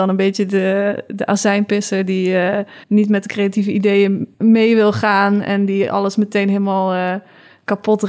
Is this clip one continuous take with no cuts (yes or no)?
no